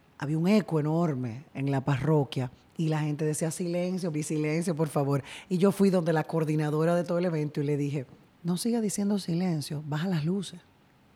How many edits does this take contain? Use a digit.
2